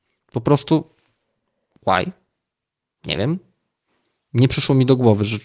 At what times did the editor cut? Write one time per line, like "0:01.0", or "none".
none